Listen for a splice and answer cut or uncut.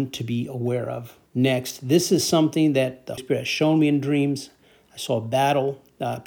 cut